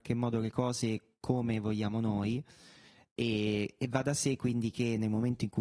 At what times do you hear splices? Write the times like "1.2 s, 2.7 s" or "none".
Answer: none